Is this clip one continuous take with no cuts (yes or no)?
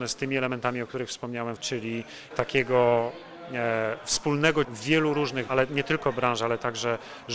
no